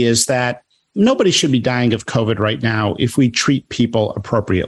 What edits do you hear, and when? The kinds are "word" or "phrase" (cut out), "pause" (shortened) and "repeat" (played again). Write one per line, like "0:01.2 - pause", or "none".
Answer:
none